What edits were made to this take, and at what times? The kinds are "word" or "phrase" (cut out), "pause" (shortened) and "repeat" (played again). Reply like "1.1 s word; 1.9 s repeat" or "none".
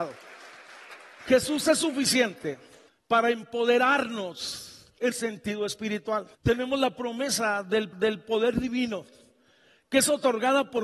5.1 s word; 6.3 s pause; 7.9 s repeat